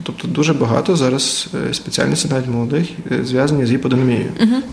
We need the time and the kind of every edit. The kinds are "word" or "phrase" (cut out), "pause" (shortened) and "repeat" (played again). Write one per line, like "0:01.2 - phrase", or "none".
none